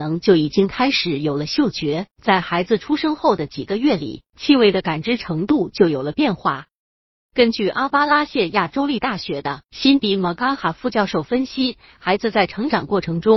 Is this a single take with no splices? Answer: no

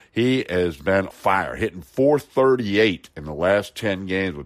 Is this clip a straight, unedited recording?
no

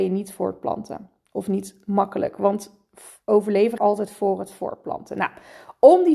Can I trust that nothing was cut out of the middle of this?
no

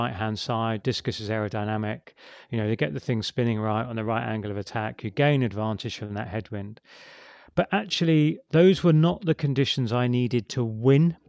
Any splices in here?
no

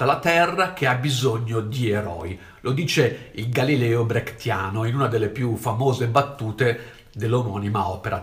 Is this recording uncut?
yes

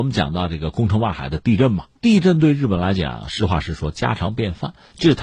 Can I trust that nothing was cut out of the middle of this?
no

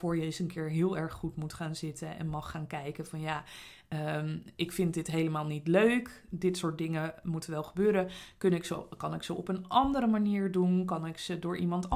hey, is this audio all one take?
yes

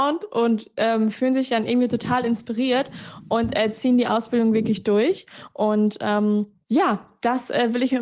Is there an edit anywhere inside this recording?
no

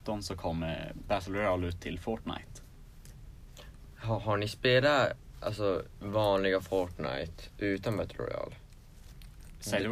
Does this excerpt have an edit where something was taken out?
no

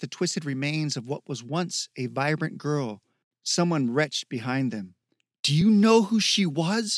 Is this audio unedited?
yes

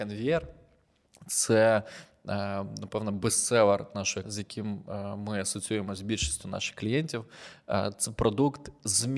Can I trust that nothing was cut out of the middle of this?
no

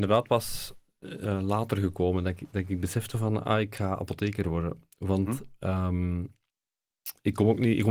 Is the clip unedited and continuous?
yes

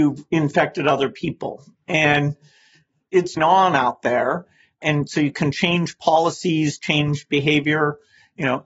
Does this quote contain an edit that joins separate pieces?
yes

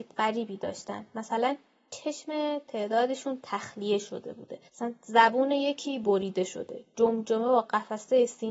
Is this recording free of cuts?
no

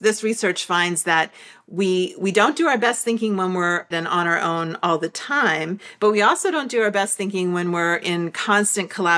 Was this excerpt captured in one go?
no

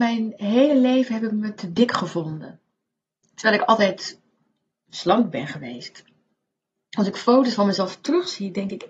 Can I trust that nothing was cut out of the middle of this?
yes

